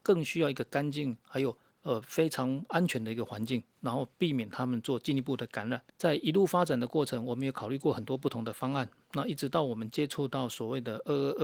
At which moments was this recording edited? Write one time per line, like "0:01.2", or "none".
0:01.7
0:05.9